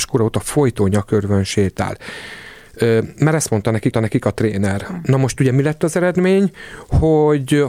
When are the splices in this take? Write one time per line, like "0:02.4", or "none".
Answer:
0:03.9